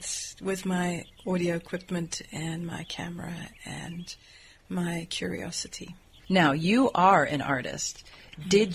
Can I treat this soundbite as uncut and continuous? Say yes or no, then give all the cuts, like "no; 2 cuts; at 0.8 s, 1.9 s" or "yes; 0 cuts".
yes; 0 cuts